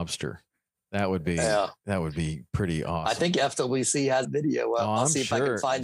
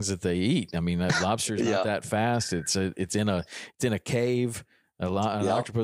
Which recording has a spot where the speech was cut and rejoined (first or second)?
first